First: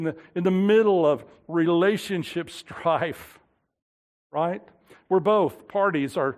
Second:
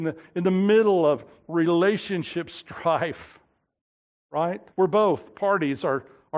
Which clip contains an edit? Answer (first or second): second